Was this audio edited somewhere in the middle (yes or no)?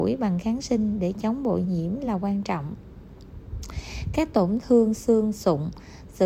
no